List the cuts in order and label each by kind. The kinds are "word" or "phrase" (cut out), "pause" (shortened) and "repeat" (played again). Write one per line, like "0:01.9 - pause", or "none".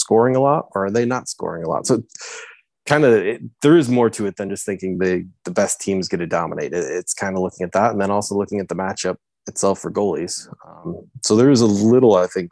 none